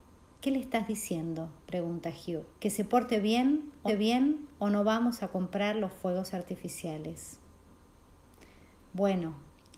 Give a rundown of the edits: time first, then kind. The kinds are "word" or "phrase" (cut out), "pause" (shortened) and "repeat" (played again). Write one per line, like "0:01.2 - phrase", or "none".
0:01.6 - pause
0:02.5 - pause
0:03.9 - repeat